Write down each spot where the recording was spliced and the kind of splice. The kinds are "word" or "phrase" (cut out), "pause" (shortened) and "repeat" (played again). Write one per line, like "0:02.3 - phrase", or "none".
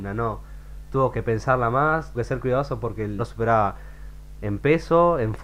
0:02.1 - word
0:03.2 - word